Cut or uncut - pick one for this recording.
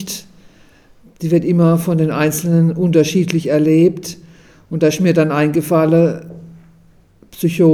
uncut